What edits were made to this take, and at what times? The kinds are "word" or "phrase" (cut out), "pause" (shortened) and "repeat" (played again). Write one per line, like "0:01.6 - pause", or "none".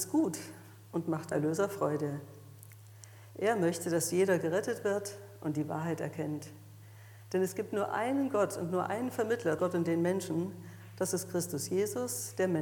0:01.3 - phrase
0:09.6 - word